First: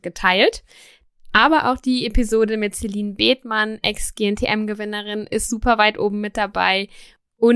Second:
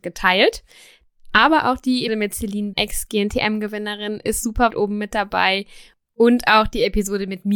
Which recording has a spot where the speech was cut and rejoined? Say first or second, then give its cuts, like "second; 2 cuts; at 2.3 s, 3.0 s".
second; 3 cuts; at 2.1 s, 2.7 s, 4.7 s